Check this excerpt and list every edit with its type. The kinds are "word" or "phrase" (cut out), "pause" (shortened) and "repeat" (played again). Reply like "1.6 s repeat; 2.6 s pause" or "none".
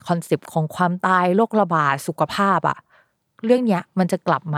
none